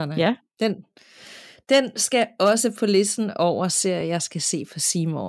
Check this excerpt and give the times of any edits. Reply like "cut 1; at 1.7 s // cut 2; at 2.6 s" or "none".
none